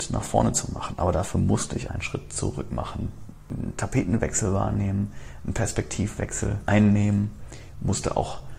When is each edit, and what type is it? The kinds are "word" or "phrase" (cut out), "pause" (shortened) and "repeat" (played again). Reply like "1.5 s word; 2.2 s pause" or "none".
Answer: 1.9 s phrase